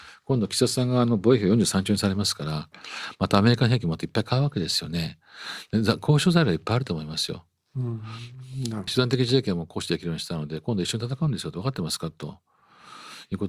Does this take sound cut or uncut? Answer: cut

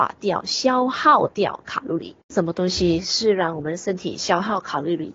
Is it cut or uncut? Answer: cut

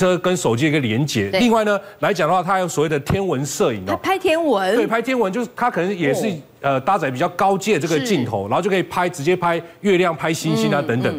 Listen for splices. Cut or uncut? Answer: uncut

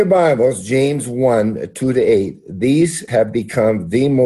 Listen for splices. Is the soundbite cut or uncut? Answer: cut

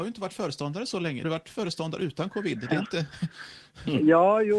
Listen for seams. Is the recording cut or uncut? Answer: cut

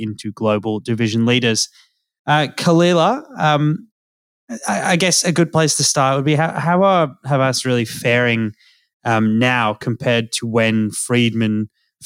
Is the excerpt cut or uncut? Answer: uncut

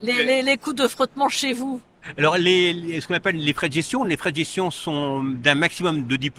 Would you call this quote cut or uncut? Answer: uncut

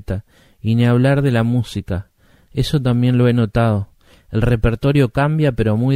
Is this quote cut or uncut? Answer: uncut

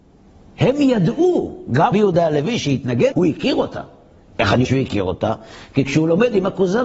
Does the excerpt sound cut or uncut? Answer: cut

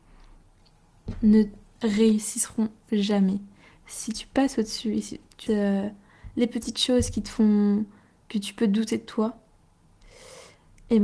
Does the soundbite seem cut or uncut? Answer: cut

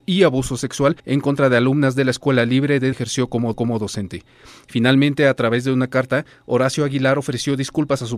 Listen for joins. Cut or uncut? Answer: cut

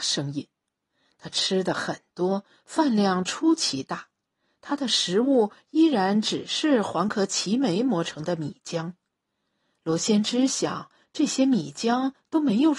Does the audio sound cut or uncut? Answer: uncut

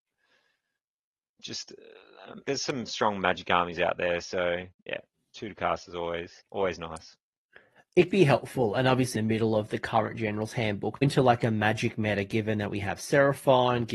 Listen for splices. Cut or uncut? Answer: cut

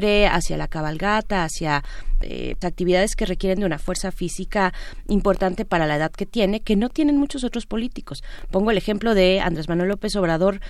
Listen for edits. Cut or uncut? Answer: cut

